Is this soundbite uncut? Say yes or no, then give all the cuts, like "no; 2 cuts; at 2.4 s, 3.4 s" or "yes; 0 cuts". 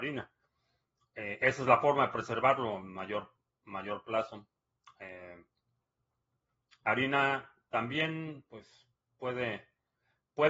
yes; 0 cuts